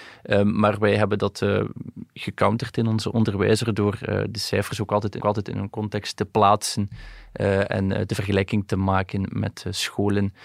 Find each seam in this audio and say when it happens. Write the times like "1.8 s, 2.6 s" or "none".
5.2 s